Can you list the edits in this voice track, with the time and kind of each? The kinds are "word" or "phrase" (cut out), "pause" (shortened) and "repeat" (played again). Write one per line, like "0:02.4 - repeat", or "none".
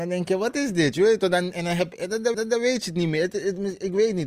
0:02.3 - repeat